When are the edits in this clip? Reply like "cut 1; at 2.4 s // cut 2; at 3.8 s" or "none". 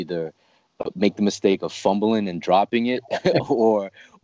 none